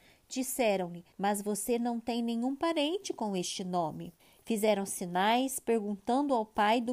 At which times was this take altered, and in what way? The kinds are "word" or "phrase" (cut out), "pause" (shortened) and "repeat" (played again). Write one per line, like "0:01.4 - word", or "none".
0:01.1 - pause
0:04.2 - pause